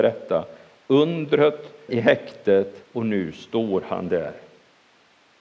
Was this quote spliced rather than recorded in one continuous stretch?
yes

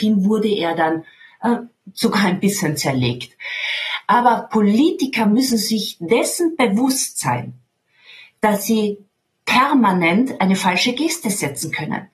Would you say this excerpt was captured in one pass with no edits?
yes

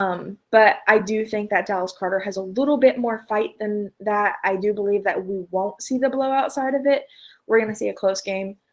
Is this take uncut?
yes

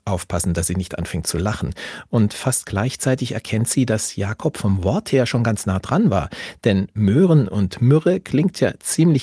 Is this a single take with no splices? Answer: yes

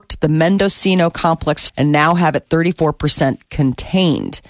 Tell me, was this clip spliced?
yes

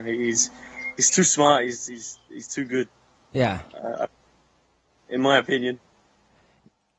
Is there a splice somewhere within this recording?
no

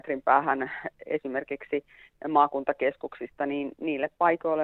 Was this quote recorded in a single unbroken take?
yes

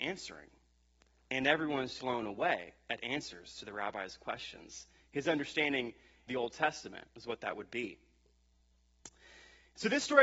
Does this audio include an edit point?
yes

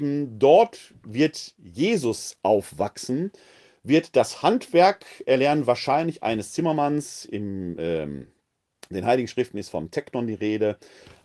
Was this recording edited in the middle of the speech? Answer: no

